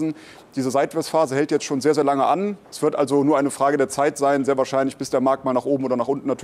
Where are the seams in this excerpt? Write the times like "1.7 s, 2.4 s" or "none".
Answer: 2.6 s